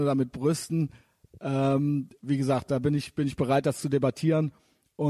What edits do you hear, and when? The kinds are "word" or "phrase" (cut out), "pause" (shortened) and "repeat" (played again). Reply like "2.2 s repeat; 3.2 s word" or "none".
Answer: none